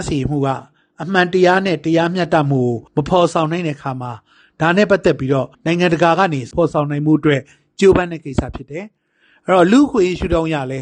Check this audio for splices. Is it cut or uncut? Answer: cut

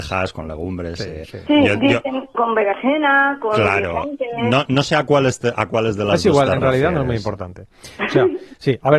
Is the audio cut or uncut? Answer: cut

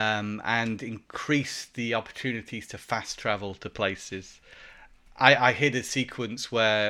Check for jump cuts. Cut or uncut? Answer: uncut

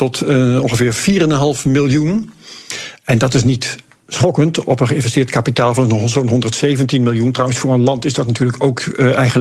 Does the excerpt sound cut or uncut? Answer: uncut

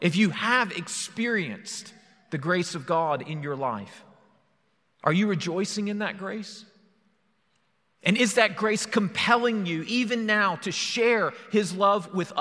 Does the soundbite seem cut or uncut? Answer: uncut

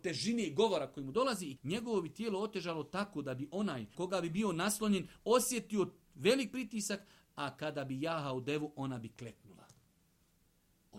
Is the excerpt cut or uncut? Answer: cut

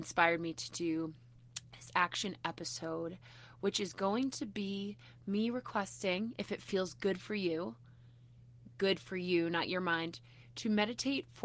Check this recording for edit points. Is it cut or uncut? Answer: uncut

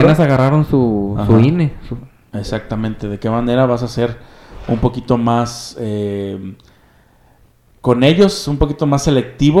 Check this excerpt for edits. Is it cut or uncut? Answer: uncut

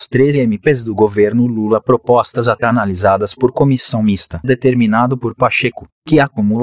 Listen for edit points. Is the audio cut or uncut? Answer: cut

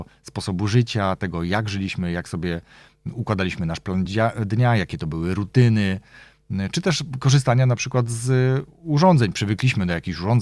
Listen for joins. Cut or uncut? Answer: uncut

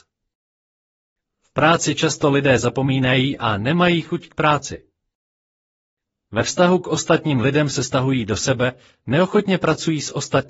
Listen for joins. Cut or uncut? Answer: uncut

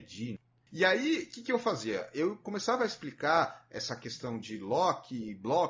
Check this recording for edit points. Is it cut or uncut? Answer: uncut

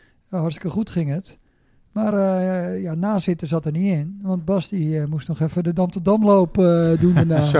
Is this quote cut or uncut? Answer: uncut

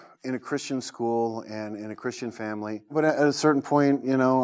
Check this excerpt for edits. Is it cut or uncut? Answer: uncut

